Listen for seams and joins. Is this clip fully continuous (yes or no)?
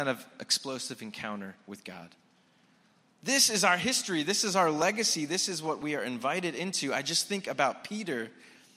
yes